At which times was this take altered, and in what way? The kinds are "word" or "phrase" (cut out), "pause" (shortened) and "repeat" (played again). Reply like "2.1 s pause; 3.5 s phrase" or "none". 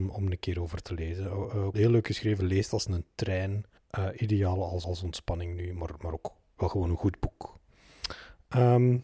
1.7 s word; 3.8 s pause; 4.8 s repeat